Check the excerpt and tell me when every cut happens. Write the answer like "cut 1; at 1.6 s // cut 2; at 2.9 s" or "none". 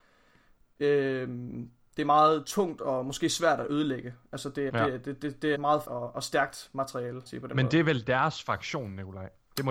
cut 1; at 4.7 s // cut 2; at 5.5 s // cut 3; at 5.8 s // cut 4; at 7.3 s